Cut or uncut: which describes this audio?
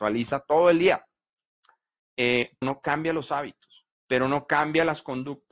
cut